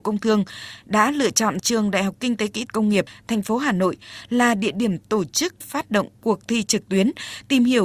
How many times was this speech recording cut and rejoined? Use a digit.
2